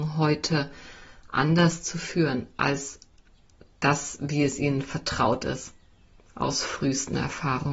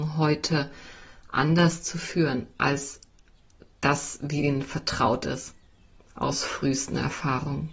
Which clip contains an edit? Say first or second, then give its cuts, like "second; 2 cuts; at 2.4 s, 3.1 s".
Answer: second; 1 cut; at 4.4 s